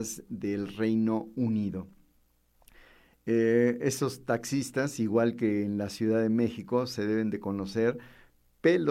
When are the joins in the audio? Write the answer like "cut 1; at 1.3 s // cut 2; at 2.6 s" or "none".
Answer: none